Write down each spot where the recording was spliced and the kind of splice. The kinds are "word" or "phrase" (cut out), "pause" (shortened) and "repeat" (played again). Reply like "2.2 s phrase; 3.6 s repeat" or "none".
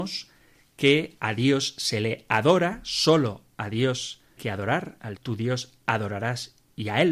4.4 s word; 5.2 s word